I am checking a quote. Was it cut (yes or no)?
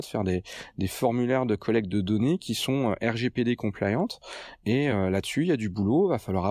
no